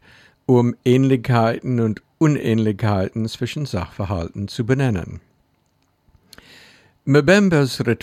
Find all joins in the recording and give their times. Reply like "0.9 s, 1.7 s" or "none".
none